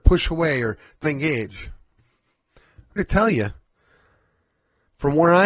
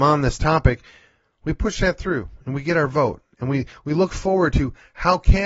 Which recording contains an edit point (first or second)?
first